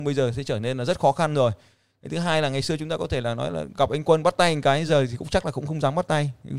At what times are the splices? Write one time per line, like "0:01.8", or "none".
none